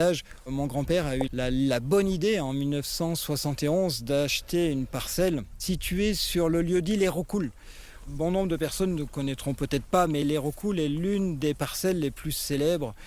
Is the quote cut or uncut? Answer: cut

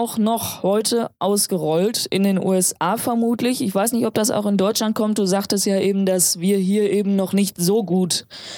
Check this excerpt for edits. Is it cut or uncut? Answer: uncut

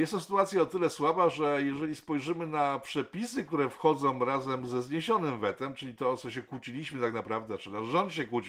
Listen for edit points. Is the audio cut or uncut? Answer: uncut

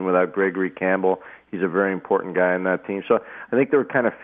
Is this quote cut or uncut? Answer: uncut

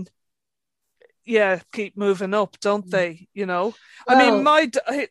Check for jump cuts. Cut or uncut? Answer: cut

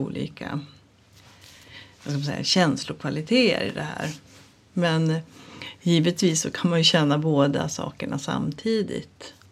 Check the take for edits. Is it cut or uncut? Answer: uncut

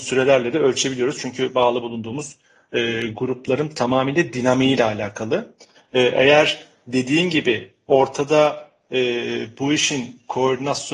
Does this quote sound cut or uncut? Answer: uncut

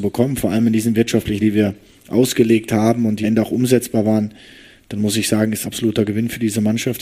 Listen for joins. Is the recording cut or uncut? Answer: cut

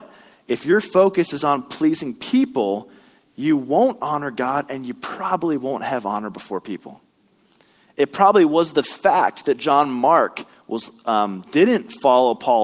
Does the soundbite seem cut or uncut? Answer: uncut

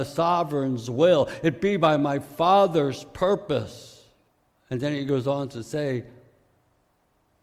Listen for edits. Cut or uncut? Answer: cut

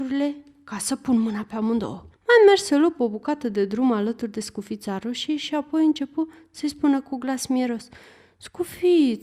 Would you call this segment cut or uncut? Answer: cut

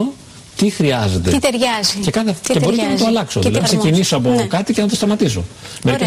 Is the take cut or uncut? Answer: cut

